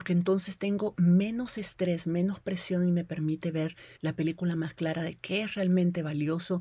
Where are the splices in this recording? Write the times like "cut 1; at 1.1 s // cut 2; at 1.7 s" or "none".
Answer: cut 1; at 4.0 s